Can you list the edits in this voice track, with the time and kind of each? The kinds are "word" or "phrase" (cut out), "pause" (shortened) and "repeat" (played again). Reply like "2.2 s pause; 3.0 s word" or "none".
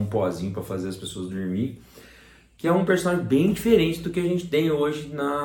none